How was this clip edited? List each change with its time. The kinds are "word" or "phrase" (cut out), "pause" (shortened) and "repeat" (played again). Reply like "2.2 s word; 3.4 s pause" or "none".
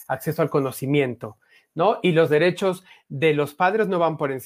none